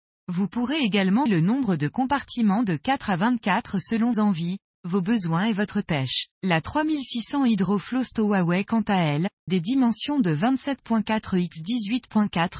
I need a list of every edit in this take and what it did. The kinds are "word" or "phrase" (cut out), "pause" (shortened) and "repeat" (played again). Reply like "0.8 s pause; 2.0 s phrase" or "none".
1.3 s word; 4.1 s word; 5.8 s phrase; 6.3 s pause; 9.5 s word